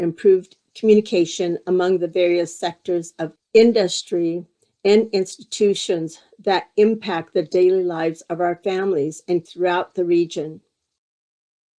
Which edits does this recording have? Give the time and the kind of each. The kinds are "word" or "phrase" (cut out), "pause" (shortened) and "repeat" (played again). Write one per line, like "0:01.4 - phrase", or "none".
0:03.4 - word
0:09.5 - word